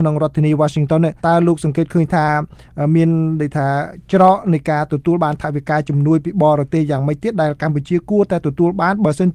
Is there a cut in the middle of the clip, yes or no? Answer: yes